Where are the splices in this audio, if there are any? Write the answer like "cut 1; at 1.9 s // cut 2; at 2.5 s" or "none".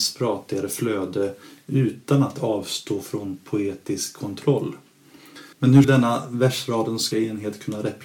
cut 1; at 5.5 s // cut 2; at 5.8 s // cut 3; at 7.1 s